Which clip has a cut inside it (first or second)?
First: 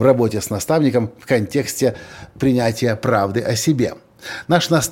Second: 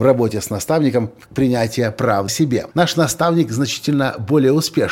second